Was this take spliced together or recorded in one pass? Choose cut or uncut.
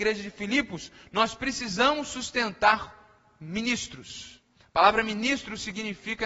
uncut